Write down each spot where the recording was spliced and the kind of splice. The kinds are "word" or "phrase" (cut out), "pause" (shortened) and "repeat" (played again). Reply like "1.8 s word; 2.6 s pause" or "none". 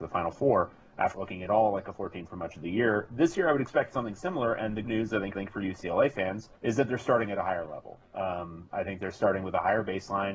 1.1 s word; 1.9 s word; 4.8 s word; 5.4 s repeat; 6.6 s pause